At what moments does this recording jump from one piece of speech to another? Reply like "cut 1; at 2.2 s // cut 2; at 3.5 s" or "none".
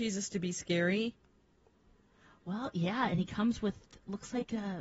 none